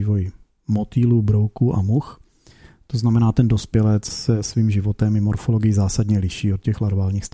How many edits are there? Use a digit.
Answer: 0